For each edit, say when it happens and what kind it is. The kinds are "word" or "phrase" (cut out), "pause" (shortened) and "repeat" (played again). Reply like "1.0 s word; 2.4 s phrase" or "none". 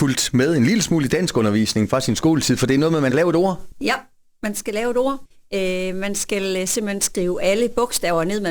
3.1 s word